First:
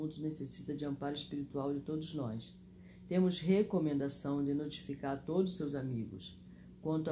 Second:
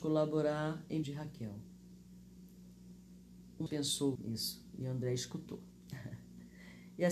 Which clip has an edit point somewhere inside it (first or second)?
second